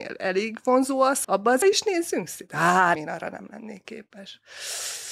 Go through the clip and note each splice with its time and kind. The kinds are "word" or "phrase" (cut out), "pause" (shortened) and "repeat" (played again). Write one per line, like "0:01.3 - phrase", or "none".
0:01.2 - word
0:01.6 - word
0:02.9 - word